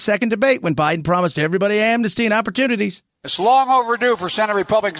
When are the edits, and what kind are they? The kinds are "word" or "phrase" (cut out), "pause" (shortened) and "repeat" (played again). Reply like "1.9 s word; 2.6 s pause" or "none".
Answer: none